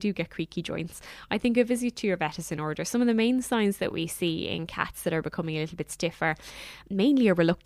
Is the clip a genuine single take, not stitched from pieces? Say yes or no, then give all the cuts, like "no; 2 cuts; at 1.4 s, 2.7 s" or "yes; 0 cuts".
yes; 0 cuts